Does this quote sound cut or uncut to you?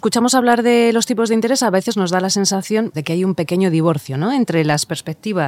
cut